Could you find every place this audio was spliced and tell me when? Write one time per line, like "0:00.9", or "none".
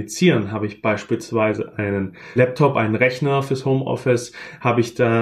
0:02.4